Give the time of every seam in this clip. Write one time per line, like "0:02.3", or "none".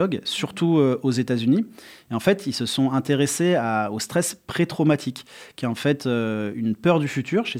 none